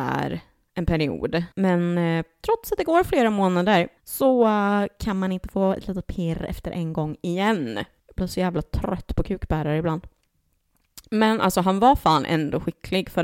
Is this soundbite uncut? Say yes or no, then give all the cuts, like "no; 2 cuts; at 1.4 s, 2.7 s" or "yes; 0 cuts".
no; 3 cuts; at 1.5 s, 4.0 s, 8.0 s